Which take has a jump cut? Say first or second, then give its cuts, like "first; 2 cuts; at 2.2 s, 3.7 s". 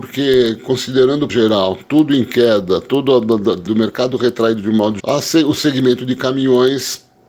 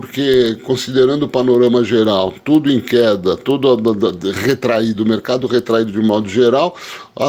first; 3 cuts; at 1.3 s, 3.7 s, 5.0 s